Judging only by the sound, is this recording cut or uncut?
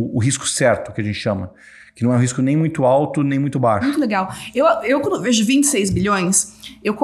uncut